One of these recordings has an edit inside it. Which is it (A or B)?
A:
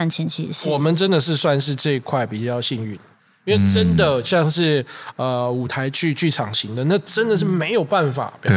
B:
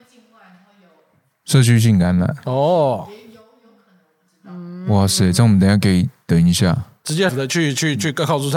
B